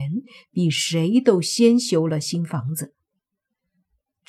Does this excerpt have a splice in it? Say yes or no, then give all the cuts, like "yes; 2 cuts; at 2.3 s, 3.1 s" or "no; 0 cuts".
no; 0 cuts